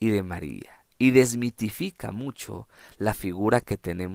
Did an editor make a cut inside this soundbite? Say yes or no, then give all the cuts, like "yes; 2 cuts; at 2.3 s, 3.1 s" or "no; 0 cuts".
no; 0 cuts